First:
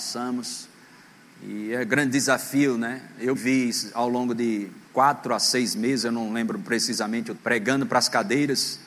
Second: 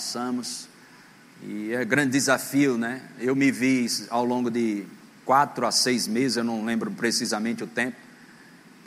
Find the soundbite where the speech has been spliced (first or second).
first